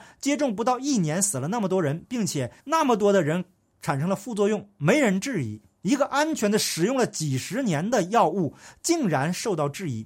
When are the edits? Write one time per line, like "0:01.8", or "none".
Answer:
0:02.6

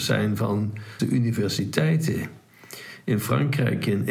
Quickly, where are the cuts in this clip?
0:01.0

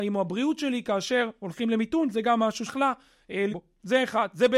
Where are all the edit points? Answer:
0:02.7
0:03.5

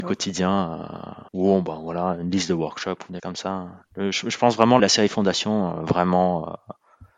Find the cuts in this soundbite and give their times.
0:01.3
0:03.2
0:04.8

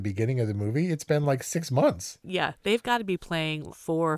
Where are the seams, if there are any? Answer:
none

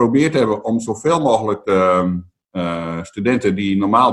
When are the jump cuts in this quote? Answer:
none

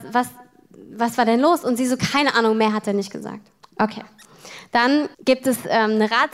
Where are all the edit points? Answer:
0:03.6
0:05.1

